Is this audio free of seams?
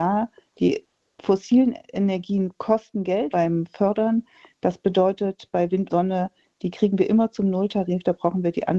no; 2 cuts; at 3.3 s, 5.9 s

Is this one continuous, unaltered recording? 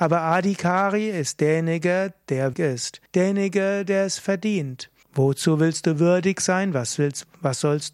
no; 3 cuts; at 2.5 s, 3.1 s, 5.0 s

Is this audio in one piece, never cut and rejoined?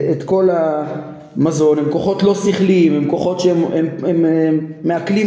yes; 0 cuts

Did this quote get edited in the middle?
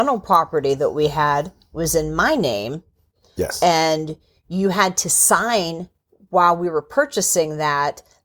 no; 0 cuts

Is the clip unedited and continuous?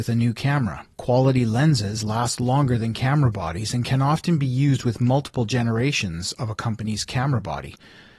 no; 1 cut; at 0.9 s

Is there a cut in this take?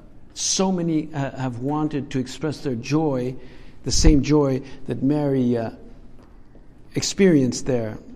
no; 0 cuts

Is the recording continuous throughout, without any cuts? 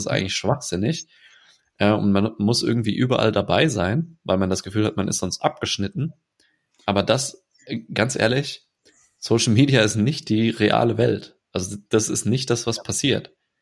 yes; 0 cuts

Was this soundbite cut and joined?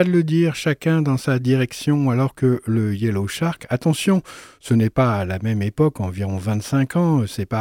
no; 0 cuts

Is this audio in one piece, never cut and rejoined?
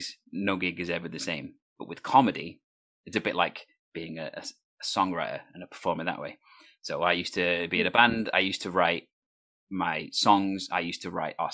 yes; 0 cuts

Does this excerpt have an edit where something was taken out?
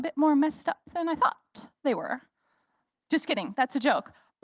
no; 0 cuts

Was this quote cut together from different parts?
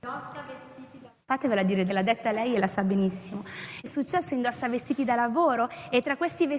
yes; 3 cuts; at 1.2 s, 1.9 s, 3.8 s

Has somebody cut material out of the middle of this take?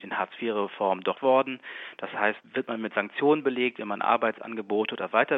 yes; 2 cuts; at 1.1 s, 2.4 s

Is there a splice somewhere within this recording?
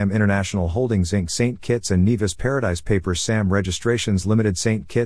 no; 0 cuts

